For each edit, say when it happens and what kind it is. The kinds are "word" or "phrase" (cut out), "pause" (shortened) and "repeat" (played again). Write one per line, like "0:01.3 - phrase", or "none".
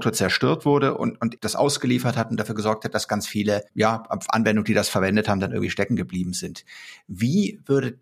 0:01.4 - word
0:03.1 - word